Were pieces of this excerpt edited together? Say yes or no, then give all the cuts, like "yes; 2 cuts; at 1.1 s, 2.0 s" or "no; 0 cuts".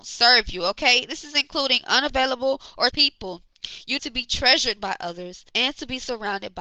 yes; 3 cuts; at 2.9 s, 4.0 s, 5.5 s